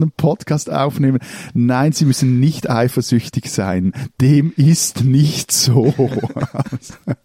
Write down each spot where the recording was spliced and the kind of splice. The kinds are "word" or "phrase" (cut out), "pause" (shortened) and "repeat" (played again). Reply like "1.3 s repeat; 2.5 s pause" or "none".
none